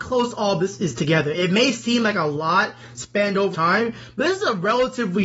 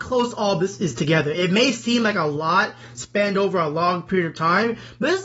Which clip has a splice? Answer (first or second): first